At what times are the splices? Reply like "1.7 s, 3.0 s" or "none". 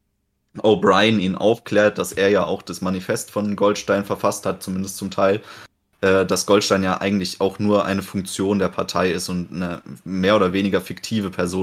none